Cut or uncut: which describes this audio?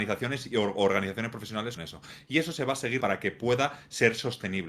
cut